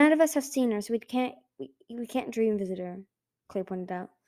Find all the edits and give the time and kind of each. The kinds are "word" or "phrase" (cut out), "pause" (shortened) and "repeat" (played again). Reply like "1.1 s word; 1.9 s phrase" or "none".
none